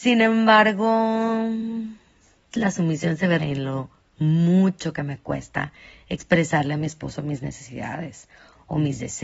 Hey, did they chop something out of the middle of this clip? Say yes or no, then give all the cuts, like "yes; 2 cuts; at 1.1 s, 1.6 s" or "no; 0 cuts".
yes; 2 cuts; at 2.5 s, 3.4 s